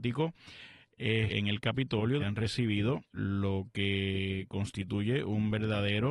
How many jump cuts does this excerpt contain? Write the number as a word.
three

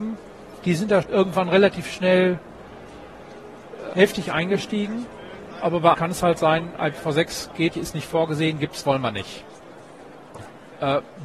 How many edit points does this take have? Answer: five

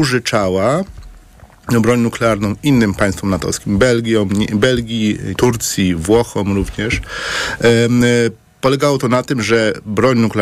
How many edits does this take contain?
one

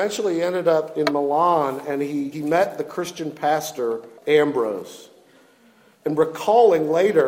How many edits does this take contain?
two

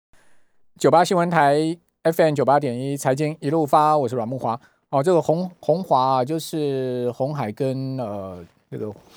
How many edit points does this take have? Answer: zero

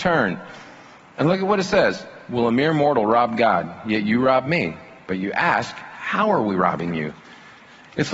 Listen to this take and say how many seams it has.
zero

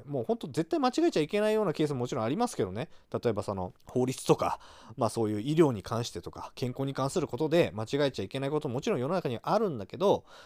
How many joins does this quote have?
one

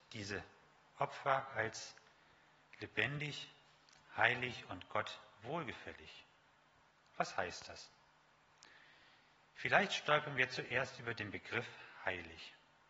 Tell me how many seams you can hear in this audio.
zero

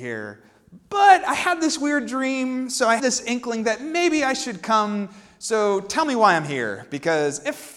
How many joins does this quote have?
one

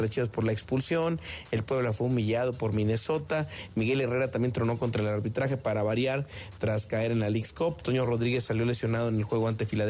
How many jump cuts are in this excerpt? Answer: zero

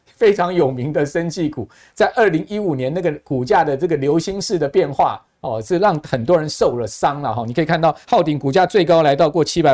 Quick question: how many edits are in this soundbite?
one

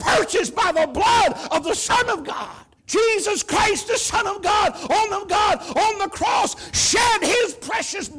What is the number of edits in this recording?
two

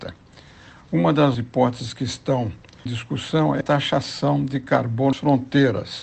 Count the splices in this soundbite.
four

